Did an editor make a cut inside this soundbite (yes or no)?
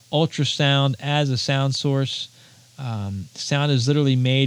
no